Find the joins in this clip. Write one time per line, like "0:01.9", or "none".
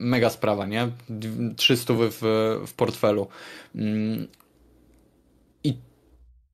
none